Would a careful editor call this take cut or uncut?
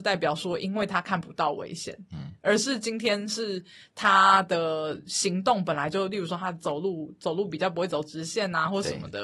uncut